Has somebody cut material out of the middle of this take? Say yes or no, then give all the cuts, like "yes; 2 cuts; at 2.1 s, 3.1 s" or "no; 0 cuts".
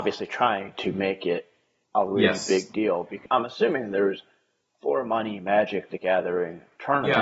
yes; 1 cut; at 3.3 s